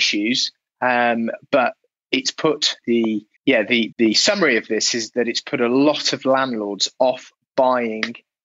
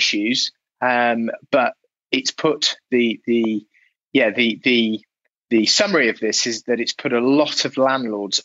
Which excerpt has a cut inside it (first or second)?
first